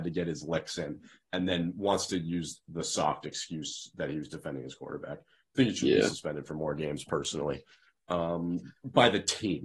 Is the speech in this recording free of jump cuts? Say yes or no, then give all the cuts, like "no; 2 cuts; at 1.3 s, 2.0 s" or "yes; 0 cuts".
yes; 0 cuts